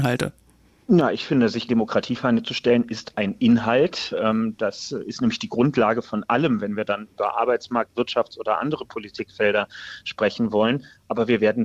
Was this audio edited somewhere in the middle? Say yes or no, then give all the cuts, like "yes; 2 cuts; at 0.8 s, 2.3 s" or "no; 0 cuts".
yes; 2 cuts; at 1.7 s, 3.1 s